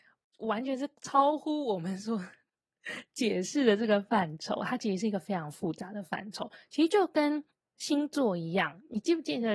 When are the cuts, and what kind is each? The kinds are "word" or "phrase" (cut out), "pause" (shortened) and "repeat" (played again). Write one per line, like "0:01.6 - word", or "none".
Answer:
0:07.5 - pause